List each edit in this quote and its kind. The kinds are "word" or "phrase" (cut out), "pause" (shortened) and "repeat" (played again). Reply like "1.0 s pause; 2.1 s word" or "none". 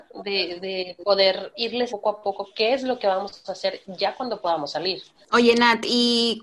1.9 s word

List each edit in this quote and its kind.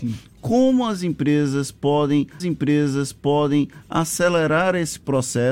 2.4 s repeat

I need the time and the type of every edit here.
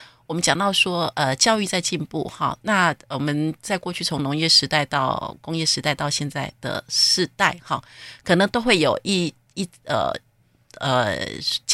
none

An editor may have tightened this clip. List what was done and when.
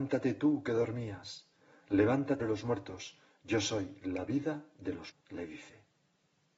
2.4 s phrase; 5.1 s word

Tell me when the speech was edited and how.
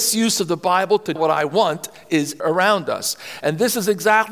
1.2 s word; 2.4 s word

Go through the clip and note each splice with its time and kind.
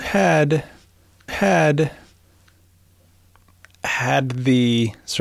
1.3 s repeat

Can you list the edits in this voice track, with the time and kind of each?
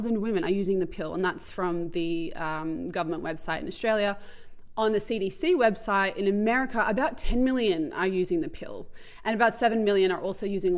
none

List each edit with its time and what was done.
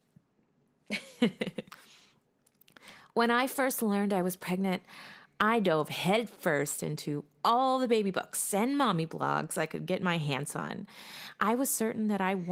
none

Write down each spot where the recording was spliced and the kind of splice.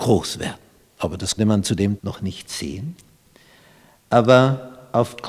1.4 s word; 2.0 s word

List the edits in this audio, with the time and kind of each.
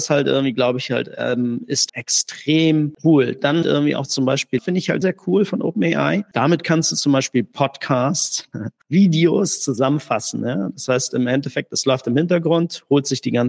1.9 s word; 3.6 s word; 4.6 s word; 5.0 s word

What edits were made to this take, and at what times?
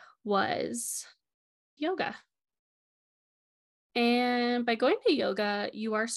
1.8 s phrase

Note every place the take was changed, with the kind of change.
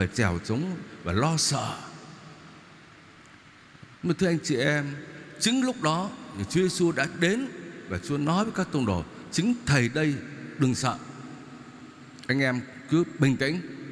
3.9 s pause

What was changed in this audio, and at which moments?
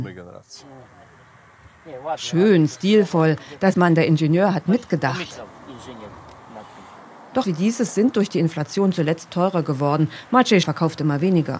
3.7 s word; 7.4 s word; 9.3 s word; 10.6 s word

